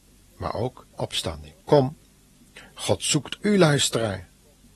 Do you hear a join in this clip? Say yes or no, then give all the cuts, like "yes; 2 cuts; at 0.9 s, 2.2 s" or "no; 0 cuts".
yes; 3 cuts; at 0.9 s, 1.6 s, 3.4 s